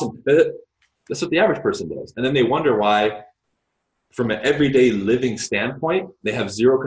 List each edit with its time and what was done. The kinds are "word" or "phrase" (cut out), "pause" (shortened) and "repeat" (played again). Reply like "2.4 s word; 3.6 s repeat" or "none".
none